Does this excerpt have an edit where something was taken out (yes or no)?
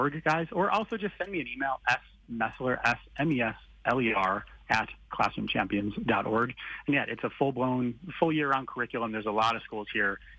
no